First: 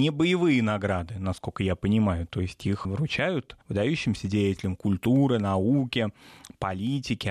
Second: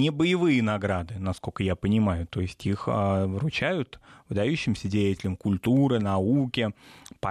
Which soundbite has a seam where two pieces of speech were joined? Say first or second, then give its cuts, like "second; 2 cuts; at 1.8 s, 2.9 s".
first; 2 cuts; at 2.8 s, 3.6 s